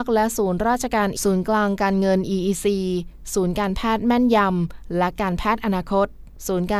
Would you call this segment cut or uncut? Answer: cut